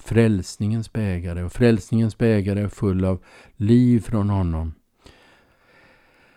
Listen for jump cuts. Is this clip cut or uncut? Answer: uncut